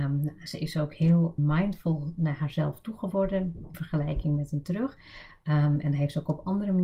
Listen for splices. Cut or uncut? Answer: cut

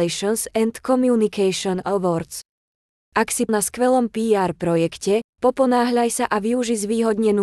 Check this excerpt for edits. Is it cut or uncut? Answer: cut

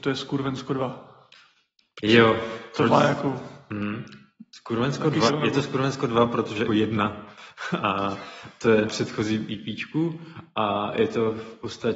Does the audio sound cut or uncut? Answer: cut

